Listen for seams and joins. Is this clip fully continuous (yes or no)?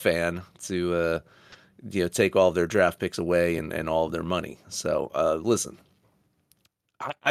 yes